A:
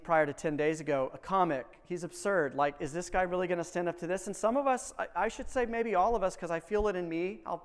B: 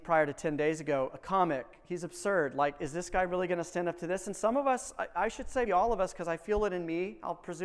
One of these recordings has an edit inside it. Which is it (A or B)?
B